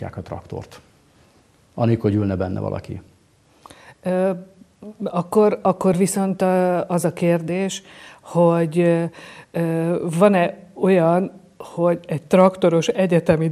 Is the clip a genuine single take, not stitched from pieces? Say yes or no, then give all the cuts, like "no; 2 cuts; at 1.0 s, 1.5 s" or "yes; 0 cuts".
yes; 0 cuts